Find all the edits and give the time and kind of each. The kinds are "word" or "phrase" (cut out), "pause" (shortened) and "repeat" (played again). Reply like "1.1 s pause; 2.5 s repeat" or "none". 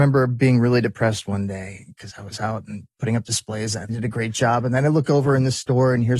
2.9 s pause; 3.9 s phrase